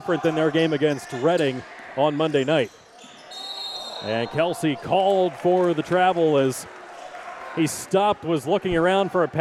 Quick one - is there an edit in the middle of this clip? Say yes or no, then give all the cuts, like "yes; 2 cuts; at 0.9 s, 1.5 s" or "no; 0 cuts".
no; 0 cuts